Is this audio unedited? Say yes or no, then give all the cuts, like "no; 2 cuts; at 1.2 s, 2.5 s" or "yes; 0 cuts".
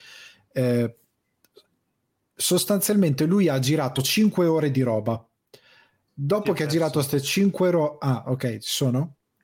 yes; 0 cuts